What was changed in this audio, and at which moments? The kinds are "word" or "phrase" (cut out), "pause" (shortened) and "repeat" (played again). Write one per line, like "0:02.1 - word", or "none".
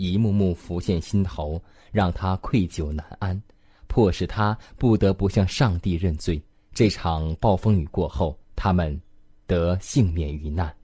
0:06.5 - pause
0:08.4 - pause